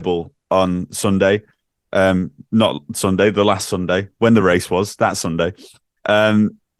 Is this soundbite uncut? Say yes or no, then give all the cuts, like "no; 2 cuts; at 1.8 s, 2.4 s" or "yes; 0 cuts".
yes; 0 cuts